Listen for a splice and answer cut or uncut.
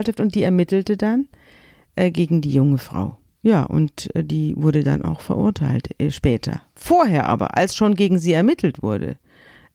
uncut